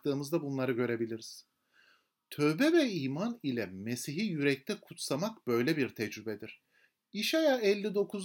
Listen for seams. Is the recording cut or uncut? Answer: uncut